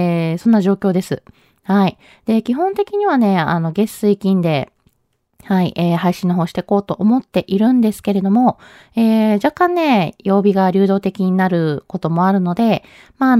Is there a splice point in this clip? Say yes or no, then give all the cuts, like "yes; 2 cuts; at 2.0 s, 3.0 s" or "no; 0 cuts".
no; 0 cuts